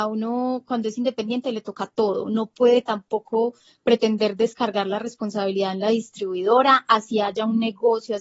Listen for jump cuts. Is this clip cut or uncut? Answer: uncut